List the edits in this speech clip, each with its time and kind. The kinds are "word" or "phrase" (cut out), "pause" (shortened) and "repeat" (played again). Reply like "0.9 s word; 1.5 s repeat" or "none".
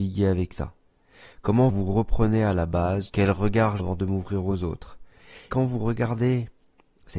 1.7 s word; 3.1 s word; 3.8 s phrase; 5.5 s word